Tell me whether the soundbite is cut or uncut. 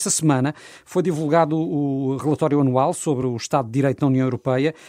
uncut